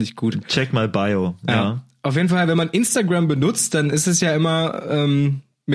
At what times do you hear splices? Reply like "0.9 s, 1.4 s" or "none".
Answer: none